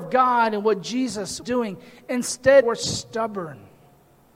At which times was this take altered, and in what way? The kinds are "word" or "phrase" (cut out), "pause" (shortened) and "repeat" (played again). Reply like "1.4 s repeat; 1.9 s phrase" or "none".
1.4 s word; 2.6 s word